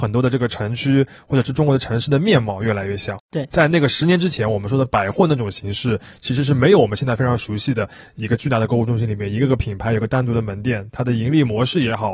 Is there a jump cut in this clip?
no; 0 cuts

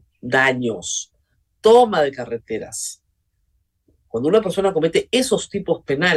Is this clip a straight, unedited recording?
yes; 0 cuts

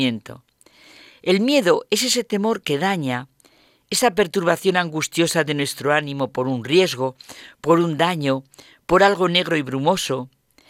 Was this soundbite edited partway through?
no; 0 cuts

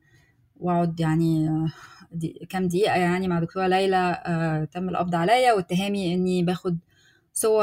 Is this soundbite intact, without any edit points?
yes; 0 cuts

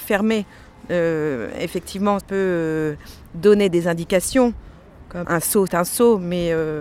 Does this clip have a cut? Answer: yes; 3 cuts; at 2.2 s, 5.2 s, 5.7 s

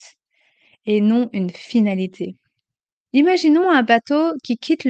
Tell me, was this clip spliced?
no; 0 cuts

